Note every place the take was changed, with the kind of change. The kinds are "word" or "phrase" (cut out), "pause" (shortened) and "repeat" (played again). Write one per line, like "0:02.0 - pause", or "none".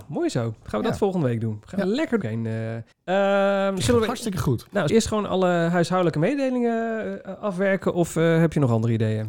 0:02.2 - phrase
0:02.9 - pause
0:04.9 - phrase

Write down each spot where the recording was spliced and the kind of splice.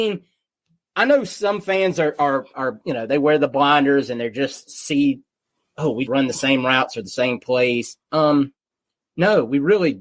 0:06.1 - word

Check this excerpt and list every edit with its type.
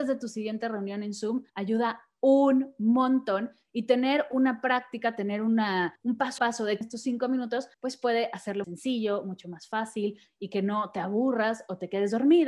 0:01.5 - pause
0:06.0 - pause
0:06.4 - word
0:06.8 - phrase
0:07.7 - pause
0:08.6 - phrase

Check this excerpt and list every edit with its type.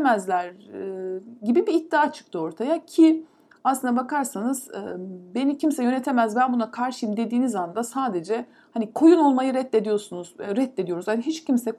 none

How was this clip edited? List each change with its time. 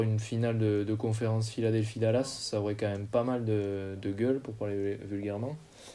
none

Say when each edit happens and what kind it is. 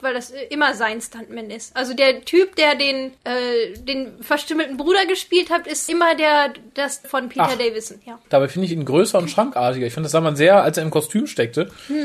0:03.2 - pause
0:05.9 - word
0:07.0 - word
0:08.2 - pause

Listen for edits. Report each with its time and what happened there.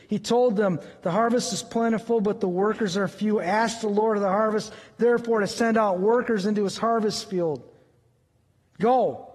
none

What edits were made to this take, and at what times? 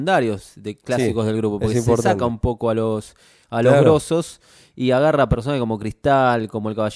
none

